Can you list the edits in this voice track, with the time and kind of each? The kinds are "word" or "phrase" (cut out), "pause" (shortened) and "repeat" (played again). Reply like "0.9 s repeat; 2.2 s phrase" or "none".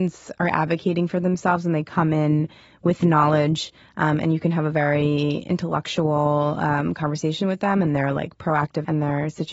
none